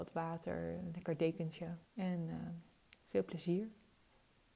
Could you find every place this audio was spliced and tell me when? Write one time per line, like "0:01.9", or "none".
0:01.9
0:02.8